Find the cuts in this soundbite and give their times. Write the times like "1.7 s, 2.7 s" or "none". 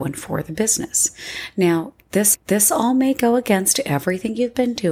2.3 s